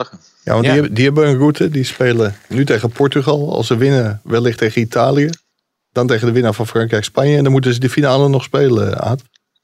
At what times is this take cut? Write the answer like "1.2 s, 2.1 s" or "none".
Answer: none

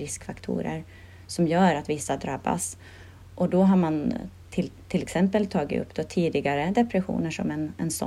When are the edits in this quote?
none

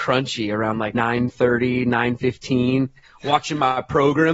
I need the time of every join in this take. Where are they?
0.9 s

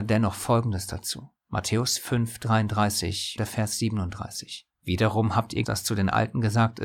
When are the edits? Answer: 1.4 s, 3.4 s, 4.7 s, 5.6 s

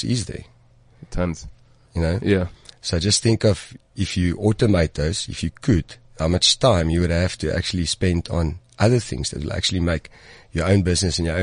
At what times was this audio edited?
none

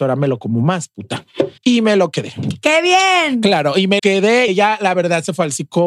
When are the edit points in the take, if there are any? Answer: 1.6 s, 4.0 s, 4.5 s

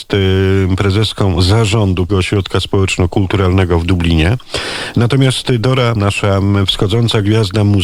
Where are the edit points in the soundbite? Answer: 2.1 s, 6.0 s

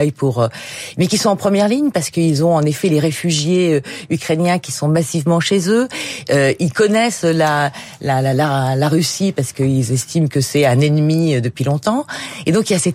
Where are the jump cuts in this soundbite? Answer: none

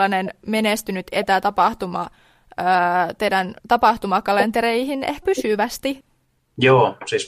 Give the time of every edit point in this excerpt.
3.6 s, 5.2 s

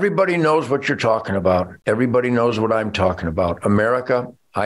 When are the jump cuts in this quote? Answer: 1.8 s

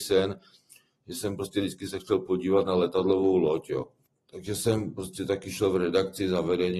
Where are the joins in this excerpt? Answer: 4.1 s

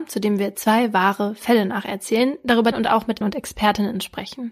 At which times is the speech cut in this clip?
2.7 s, 3.2 s

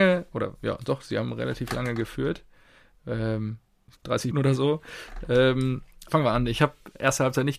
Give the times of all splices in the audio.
4.0 s, 4.3 s, 6.1 s

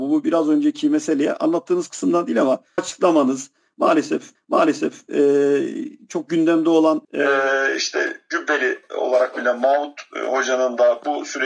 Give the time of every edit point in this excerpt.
2.8 s, 4.3 s, 7.0 s

